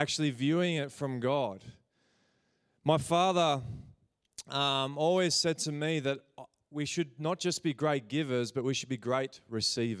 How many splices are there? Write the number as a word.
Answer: zero